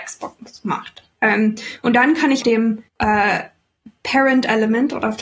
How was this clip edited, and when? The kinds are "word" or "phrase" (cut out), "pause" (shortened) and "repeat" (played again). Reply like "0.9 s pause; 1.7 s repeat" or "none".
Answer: 2.4 s word; 2.9 s pause